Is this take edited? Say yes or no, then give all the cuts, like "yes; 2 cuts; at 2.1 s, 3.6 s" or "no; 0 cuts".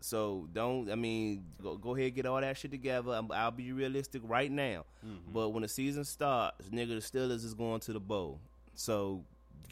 yes; 2 cuts; at 1.6 s, 8.6 s